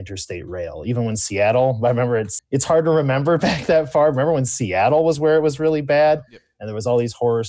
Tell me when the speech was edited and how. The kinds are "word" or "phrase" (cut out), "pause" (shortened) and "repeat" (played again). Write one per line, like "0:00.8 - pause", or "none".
0:02.4 - word

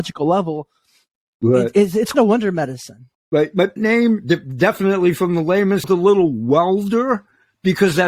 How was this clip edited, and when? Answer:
0:02.1 - word
0:03.1 - pause
0:03.8 - phrase
0:05.8 - phrase

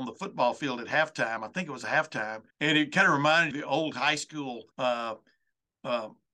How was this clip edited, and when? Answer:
0:02.5 - pause
0:03.5 - word
0:04.7 - pause

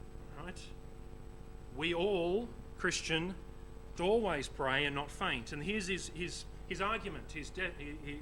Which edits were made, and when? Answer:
0:04.0 - word

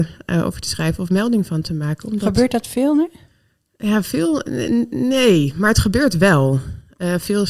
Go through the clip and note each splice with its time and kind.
none

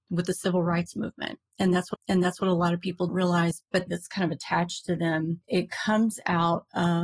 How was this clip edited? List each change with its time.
0:01.9 - repeat
0:03.1 - word
0:03.9 - phrase

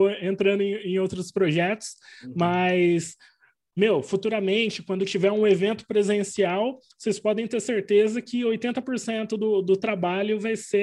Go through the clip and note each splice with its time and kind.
none

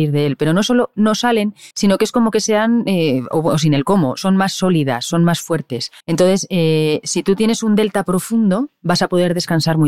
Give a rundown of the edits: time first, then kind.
0:01.7 - pause
0:06.0 - pause

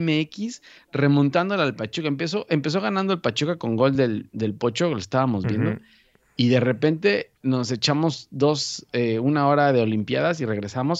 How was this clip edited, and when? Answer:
none

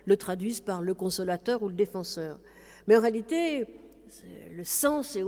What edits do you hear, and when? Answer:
none

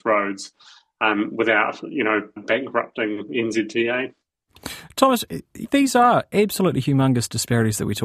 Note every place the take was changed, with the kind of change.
0:02.4 - word
0:05.6 - word

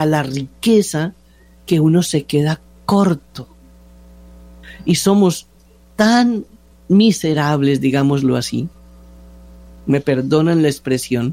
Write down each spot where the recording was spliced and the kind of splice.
none

